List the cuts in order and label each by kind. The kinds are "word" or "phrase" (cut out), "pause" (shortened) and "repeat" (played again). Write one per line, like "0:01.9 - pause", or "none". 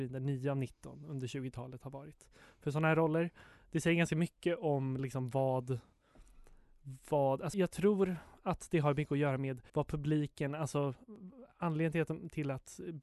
0:07.5 - word
0:09.7 - pause